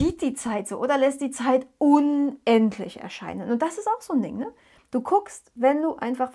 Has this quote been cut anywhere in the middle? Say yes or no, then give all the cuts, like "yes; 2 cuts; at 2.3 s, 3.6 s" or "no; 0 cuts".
no; 0 cuts